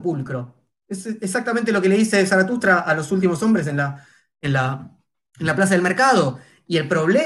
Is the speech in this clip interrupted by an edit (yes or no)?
no